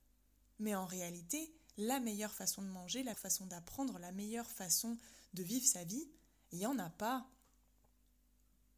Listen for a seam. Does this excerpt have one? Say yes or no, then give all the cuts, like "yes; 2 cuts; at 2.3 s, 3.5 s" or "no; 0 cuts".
yes; 1 cut; at 3.1 s